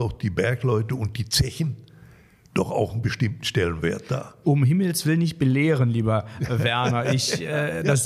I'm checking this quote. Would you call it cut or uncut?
uncut